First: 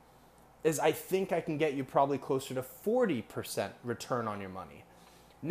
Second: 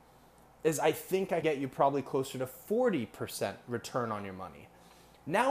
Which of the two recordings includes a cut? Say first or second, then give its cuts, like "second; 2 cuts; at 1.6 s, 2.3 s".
second; 1 cut; at 1.4 s